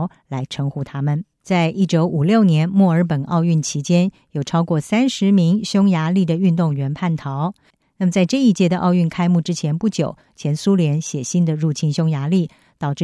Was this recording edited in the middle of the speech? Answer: yes; 1 cut; at 1.3 s

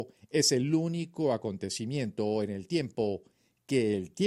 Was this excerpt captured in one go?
yes; 0 cuts

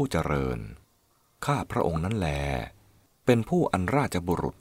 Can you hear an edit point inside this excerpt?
no; 0 cuts

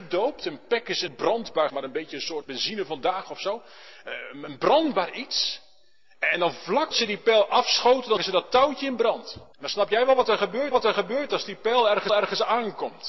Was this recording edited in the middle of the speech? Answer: yes; 8 cuts; at 1.1 s, 1.7 s, 2.4 s, 6.9 s, 8.2 s, 9.5 s, 10.7 s, 12.1 s

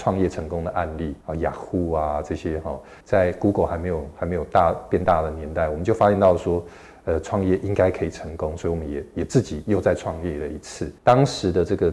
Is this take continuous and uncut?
no; 3 cuts; at 1.2 s, 3.0 s, 11.0 s

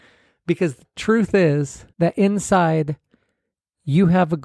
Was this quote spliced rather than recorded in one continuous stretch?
yes; 1 cut; at 1.9 s

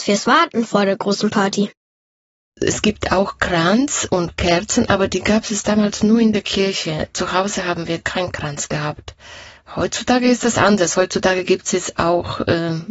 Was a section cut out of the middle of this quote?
no; 0 cuts

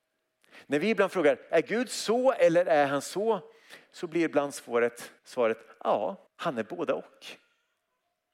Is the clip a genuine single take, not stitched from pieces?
no; 2 cuts; at 5.2 s, 6.3 s

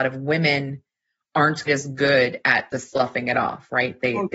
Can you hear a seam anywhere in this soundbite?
yes; 1 cut; at 1.7 s

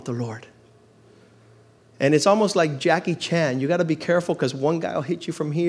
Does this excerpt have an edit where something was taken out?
no; 0 cuts

